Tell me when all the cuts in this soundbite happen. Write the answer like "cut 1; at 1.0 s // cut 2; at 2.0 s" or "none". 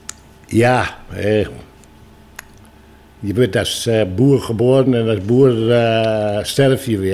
none